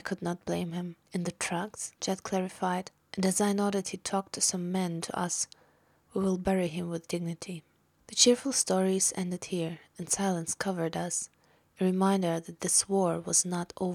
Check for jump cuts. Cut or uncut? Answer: cut